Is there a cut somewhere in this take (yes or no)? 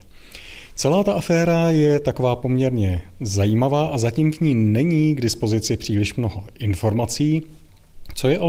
no